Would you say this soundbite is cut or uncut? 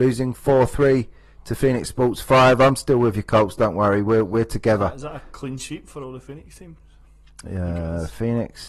uncut